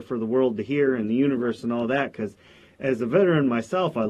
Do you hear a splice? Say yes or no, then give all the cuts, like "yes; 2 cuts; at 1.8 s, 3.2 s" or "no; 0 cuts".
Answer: no; 0 cuts